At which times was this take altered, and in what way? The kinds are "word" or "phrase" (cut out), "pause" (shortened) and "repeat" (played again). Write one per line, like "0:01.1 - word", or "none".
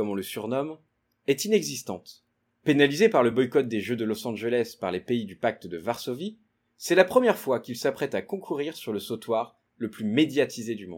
none